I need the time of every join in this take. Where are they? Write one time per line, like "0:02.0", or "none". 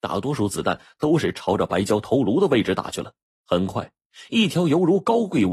none